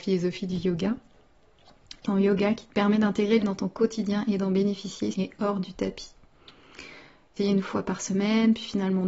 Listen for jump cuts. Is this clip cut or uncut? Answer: cut